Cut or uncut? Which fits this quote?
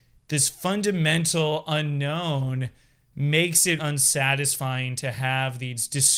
cut